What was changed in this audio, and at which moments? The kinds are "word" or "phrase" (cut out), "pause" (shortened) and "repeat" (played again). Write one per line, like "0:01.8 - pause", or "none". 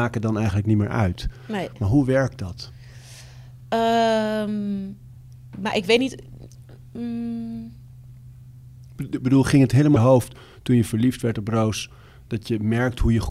0:10.0 - phrase